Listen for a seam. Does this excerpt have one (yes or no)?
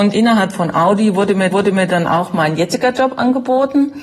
yes